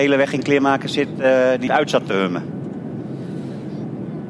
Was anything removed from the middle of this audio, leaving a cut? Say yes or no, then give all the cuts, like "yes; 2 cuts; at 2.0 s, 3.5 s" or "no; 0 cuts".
yes; 1 cut; at 1.7 s